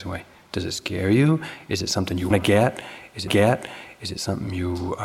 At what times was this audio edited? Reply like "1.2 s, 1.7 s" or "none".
2.3 s, 3.3 s

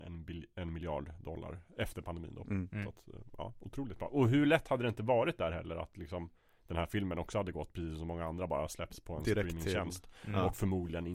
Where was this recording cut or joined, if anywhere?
none

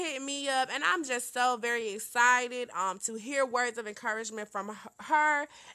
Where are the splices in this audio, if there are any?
none

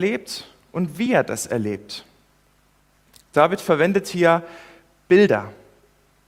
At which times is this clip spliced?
none

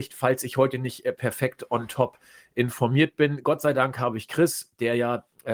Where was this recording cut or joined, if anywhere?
none

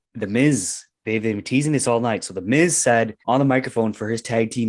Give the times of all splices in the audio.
3.2 s

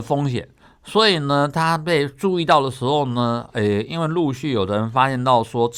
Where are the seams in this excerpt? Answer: none

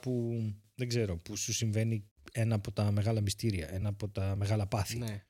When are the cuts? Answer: none

